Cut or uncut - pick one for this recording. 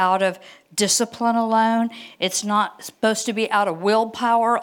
uncut